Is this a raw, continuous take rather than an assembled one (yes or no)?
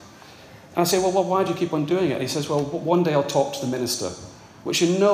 yes